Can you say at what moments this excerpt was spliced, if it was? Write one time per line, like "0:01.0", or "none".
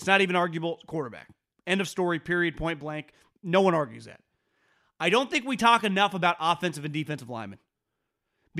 none